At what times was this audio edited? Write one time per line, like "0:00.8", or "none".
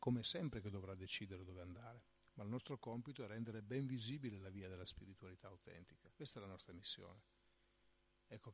0:06.1

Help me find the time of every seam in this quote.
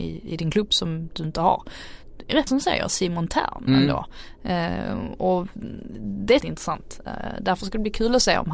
0:02.5
0:06.4

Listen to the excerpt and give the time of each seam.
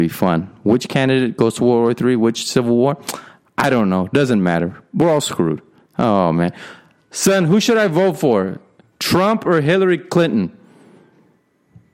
none

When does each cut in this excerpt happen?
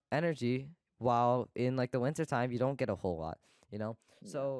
none

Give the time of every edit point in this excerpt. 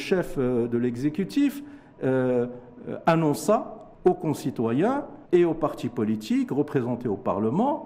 0:03.9
0:05.3

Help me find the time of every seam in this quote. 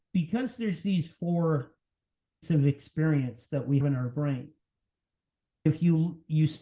0:02.4
0:03.8
0:05.7

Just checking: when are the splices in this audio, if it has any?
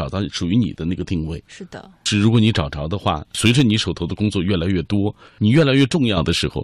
0:01.4

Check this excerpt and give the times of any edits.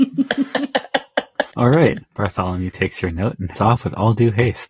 0:01.5
0:02.1
0:03.5

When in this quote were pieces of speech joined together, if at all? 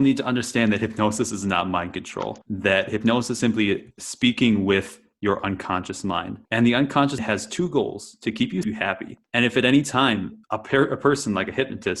0:02.4
0:03.4
0:03.9
0:06.4
0:07.2
0:08.6
0:09.3
0:10.4

